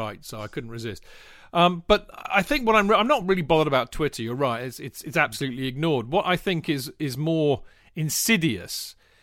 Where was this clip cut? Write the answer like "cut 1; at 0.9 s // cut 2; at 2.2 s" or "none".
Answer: none